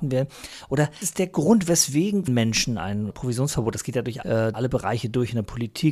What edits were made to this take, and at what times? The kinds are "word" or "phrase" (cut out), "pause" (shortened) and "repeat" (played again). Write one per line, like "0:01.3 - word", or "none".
0:01.0 - word
0:02.3 - word
0:03.1 - word
0:04.2 - word
0:04.5 - word